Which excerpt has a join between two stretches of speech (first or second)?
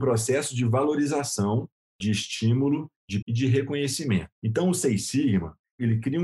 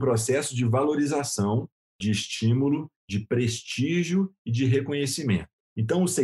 first